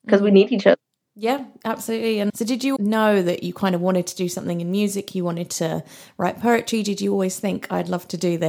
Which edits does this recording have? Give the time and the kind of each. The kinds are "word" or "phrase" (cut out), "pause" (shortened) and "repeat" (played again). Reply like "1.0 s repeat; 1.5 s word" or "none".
2.3 s word; 2.8 s word